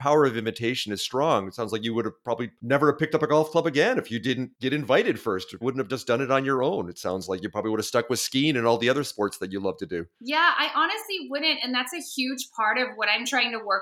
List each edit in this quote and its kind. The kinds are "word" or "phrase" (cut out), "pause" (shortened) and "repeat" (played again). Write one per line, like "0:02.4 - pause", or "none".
0:01.0 - word
0:05.6 - word

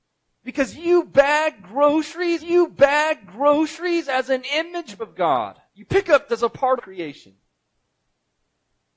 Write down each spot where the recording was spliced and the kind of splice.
0:02.4 - repeat
0:05.0 - word
0:05.7 - pause
0:06.3 - word
0:06.8 - phrase

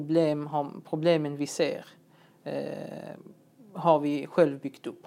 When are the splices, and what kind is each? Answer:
none

